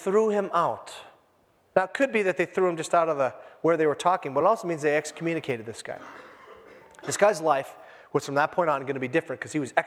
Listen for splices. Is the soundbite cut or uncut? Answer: uncut